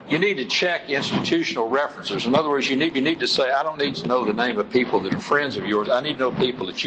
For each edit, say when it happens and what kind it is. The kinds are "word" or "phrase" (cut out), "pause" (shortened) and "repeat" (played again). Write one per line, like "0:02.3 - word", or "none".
0:02.9 - repeat
0:03.9 - word